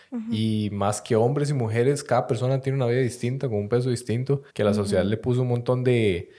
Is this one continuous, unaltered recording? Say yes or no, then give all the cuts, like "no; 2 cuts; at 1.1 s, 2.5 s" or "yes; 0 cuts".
no; 1 cut; at 4.5 s